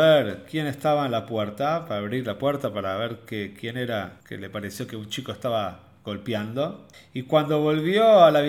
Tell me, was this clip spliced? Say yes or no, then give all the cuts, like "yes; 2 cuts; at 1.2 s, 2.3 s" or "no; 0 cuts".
yes; 2 cuts; at 4.2 s, 6.9 s